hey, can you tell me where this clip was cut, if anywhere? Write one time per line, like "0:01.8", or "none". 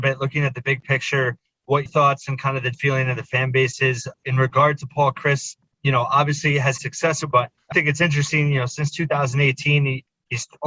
0:01.9
0:02.7
0:06.8
0:07.3
0:07.7